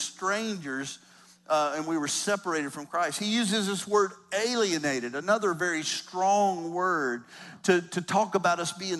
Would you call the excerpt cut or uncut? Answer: uncut